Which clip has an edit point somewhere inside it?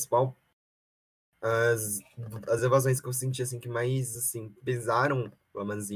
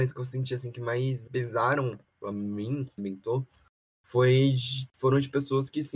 second; 3 cuts; at 1.3 s, 2.3 s, 3.0 s

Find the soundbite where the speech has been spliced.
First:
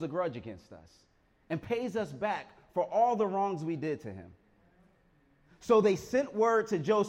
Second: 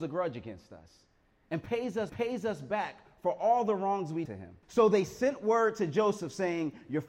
second; 3 cuts; at 2.1 s, 4.3 s, 4.6 s

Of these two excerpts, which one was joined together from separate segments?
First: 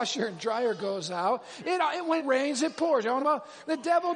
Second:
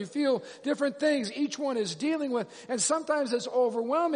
first; 2 cuts; at 2.2 s, 3.2 s

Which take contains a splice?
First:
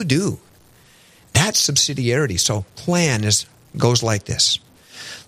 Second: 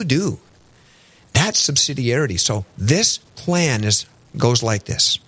first; 1 cut; at 2.7 s

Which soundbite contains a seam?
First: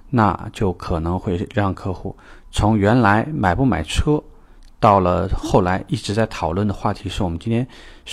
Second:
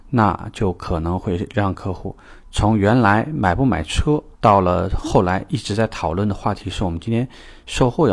second; 1 cut; at 4.3 s

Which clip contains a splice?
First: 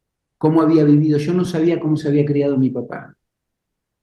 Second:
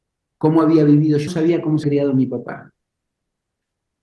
second; 2 cuts; at 1.3 s, 1.8 s

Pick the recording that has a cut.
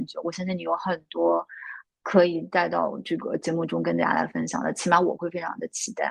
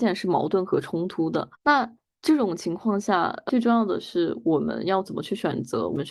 second; 1 cut; at 1.5 s

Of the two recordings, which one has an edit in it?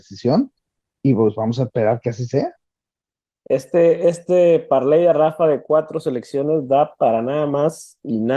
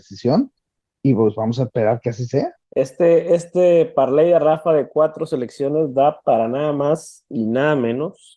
second; 1 cut; at 2.6 s

